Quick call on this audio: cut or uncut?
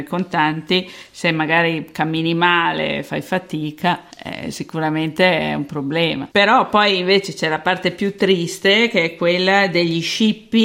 cut